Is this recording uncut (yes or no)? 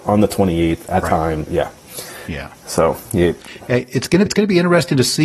no